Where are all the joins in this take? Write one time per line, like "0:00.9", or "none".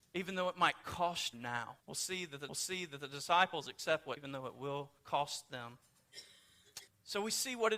0:01.3
0:01.8
0:02.5
0:04.2
0:05.0
0:06.9